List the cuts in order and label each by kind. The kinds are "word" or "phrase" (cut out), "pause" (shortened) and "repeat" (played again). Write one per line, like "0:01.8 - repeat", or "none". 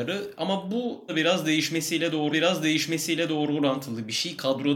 0:01.1 - word
0:02.3 - repeat